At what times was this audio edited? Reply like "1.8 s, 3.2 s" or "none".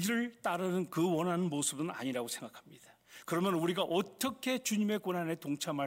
none